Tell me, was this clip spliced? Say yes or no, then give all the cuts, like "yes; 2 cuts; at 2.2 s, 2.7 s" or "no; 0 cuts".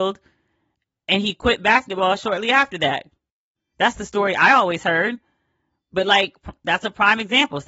no; 0 cuts